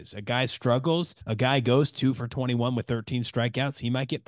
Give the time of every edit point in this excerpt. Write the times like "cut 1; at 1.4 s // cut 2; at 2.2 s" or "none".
cut 1; at 1.2 s